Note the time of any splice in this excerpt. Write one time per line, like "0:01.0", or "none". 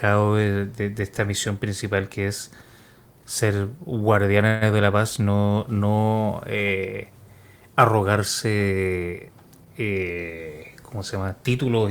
none